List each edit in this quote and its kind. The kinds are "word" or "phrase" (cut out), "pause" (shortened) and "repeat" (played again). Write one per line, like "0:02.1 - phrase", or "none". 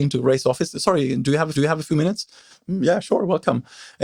0:01.5 - repeat